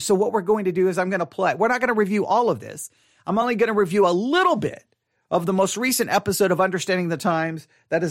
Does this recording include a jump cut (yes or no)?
no